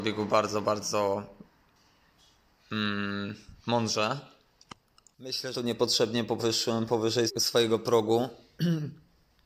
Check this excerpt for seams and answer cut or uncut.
cut